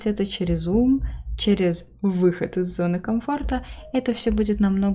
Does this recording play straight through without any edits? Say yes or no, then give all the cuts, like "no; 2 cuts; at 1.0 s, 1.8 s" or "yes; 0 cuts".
yes; 0 cuts